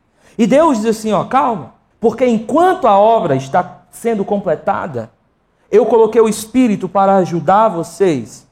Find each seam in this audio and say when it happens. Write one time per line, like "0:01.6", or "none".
0:01.9